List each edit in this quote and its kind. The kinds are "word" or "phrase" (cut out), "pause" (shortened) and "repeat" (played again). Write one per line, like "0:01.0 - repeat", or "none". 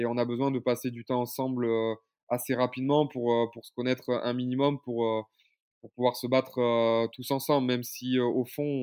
none